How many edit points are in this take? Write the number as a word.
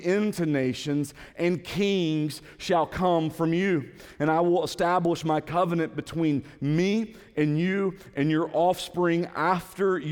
zero